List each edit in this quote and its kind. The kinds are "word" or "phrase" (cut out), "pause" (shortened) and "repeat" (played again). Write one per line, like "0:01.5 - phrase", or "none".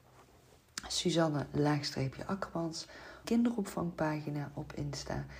0:03.2 - phrase